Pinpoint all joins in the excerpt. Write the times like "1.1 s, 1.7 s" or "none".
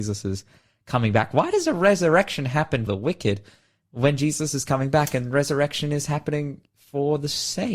2.9 s